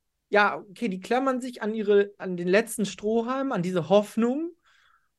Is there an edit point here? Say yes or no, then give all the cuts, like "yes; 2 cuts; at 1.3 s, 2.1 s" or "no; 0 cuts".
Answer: no; 0 cuts